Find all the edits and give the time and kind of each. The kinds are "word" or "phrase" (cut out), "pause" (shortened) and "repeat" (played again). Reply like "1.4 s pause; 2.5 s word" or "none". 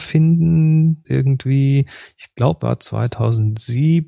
1.0 s word; 2.6 s word